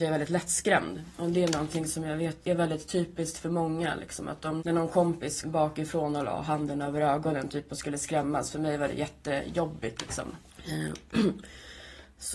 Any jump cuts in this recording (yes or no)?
yes